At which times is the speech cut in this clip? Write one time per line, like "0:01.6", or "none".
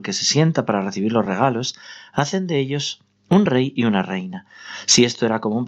none